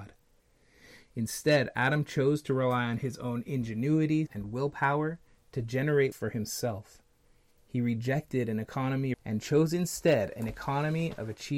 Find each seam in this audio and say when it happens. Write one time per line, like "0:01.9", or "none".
0:04.3
0:06.1
0:09.1